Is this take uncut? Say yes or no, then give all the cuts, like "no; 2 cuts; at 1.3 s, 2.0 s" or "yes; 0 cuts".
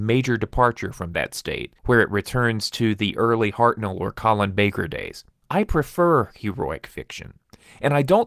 no; 2 cuts; at 1.8 s, 5.4 s